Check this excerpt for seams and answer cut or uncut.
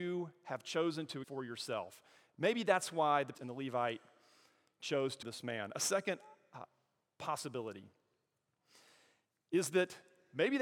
cut